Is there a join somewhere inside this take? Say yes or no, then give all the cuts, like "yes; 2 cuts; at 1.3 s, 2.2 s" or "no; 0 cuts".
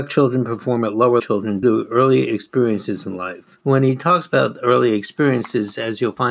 yes; 3 cuts; at 1.2 s, 1.6 s, 3.6 s